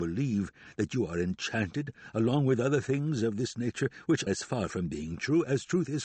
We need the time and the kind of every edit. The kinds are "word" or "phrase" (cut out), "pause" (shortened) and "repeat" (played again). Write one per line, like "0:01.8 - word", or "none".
0:04.3 - word